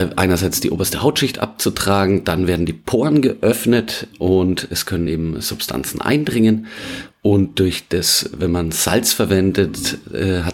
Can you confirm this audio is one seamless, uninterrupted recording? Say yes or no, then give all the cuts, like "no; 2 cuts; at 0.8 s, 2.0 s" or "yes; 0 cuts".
yes; 0 cuts